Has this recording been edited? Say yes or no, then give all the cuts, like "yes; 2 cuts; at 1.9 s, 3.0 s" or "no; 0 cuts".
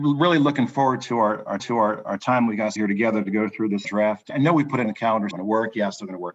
yes; 6 cuts; at 1.6 s, 2.8 s, 3.8 s, 4.3 s, 4.8 s, 5.3 s